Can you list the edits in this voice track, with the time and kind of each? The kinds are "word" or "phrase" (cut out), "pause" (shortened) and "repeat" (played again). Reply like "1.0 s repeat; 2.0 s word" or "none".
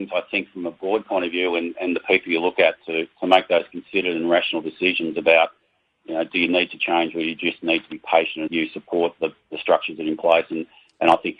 8.5 s phrase

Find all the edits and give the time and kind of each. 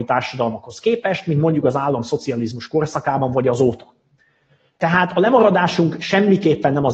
none

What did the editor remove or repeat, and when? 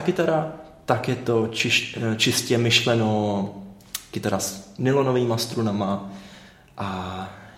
none

